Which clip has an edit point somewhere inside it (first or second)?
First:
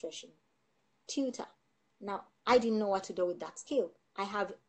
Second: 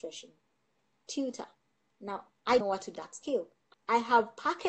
second